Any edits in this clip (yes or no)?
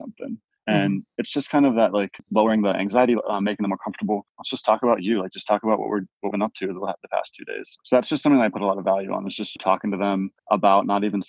yes